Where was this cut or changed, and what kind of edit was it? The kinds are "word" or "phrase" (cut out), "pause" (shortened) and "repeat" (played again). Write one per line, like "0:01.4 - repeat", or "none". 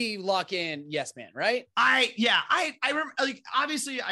none

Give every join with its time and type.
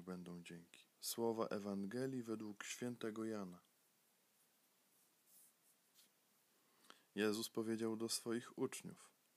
0:00.9 - pause

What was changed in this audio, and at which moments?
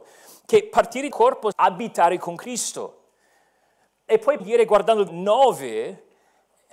0:01.1 - word
0:01.5 - word
0:04.4 - word
0:05.1 - word

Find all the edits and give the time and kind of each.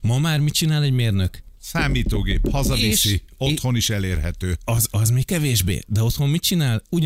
0:01.5 - pause

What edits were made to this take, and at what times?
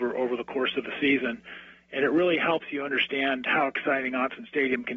none

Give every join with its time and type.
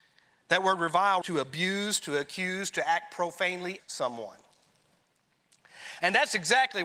0:01.2 - word
0:03.8 - word

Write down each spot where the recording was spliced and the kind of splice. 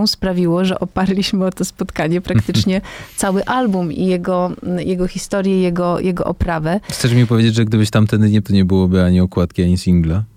0:08.4 - word

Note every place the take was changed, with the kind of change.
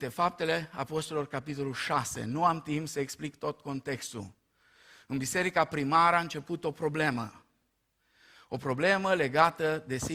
none

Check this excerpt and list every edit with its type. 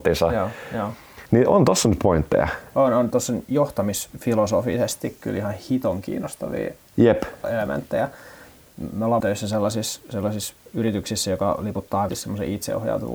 0:01.3 - pause
0:03.1 - word
0:09.2 - word
0:12.1 - word

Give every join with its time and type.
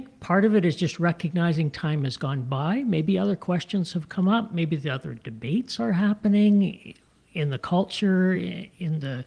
none

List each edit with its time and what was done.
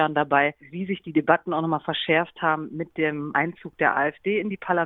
none

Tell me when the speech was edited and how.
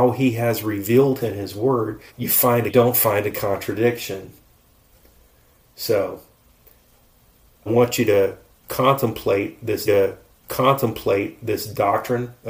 0:01.2 - word
0:02.1 - pause
0:02.7 - phrase
0:07.7 - word
0:09.9 - repeat

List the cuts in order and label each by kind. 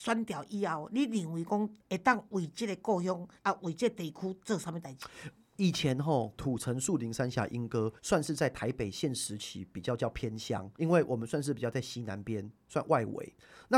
0:01.8 - pause
0:03.4 - pause
0:08.0 - pause
0:10.7 - pause

